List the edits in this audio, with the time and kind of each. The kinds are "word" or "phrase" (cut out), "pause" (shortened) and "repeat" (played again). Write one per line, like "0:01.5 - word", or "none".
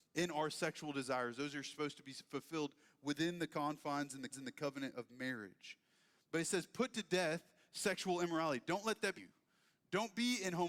0:04.3 - repeat
0:09.2 - phrase